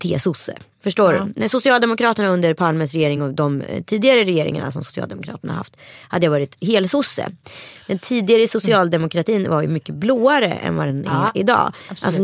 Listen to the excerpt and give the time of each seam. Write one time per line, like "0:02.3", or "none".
none